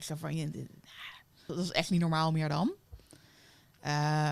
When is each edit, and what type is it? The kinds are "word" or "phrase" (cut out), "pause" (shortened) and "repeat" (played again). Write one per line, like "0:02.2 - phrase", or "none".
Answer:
0:01.5 - word